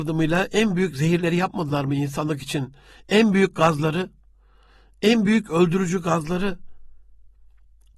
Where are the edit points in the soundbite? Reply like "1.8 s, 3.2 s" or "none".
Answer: none